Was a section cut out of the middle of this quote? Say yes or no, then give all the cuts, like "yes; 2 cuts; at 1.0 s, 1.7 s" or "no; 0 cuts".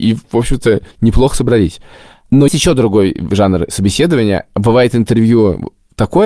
yes; 2 cuts; at 0.9 s, 2.5 s